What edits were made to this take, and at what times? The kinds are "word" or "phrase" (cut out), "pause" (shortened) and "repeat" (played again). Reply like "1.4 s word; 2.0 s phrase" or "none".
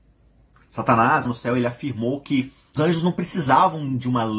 1.3 s word; 2.8 s word